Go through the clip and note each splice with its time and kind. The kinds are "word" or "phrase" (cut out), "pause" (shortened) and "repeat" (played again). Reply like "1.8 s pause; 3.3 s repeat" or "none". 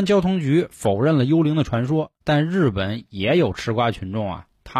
2.2 s pause